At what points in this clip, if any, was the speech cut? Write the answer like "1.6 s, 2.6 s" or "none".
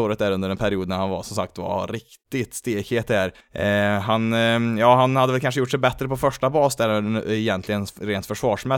3.4 s